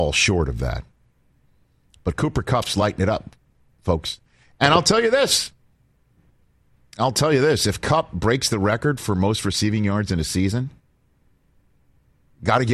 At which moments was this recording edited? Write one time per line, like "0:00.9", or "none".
none